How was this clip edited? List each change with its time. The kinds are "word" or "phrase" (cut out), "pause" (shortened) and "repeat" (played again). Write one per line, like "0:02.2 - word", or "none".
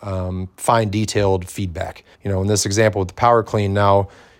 0:02.1 - pause